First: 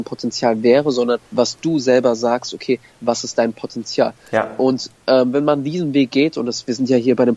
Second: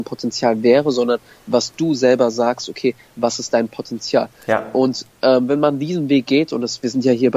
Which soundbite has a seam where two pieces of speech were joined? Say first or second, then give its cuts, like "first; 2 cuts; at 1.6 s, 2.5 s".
first; 1 cut; at 1.2 s